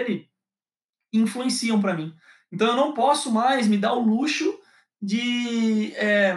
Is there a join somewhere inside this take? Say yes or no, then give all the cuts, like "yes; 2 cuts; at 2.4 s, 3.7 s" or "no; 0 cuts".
no; 0 cuts